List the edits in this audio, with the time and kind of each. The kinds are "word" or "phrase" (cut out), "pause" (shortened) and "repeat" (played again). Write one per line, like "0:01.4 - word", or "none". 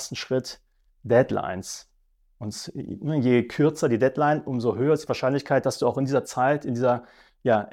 none